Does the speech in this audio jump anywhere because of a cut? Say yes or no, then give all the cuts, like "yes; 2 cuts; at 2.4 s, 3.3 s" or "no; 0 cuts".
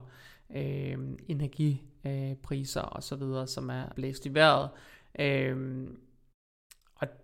yes; 1 cut; at 3.9 s